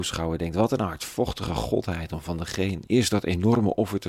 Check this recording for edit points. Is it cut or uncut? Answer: cut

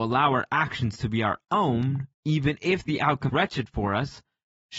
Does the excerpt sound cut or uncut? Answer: cut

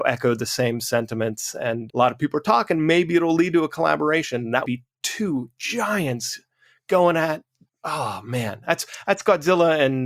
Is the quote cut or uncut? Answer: cut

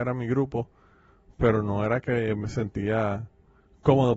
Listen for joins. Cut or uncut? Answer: uncut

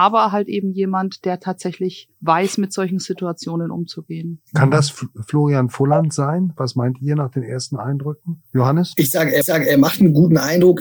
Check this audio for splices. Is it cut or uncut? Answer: cut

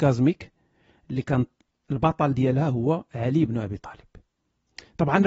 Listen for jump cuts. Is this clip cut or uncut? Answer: uncut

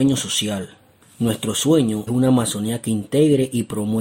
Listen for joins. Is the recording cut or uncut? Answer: cut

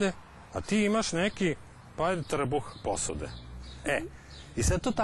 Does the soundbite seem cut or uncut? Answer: uncut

